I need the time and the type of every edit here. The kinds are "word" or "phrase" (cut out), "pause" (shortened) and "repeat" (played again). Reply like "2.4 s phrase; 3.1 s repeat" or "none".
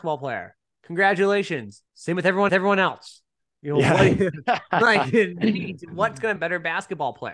1.9 s pause; 2.5 s repeat; 6.4 s phrase